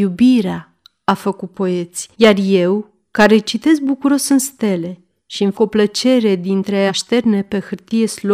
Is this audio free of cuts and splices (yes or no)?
no